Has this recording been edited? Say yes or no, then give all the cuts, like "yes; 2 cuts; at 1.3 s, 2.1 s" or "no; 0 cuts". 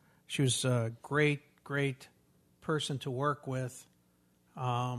no; 0 cuts